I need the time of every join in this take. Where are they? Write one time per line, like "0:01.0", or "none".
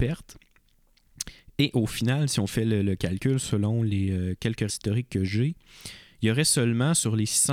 0:04.7